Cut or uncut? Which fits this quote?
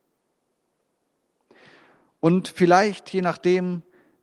uncut